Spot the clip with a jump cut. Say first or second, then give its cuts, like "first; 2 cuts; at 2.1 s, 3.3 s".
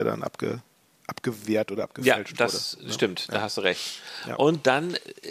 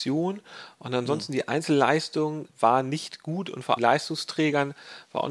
second; 2 cuts; at 2.5 s, 3.8 s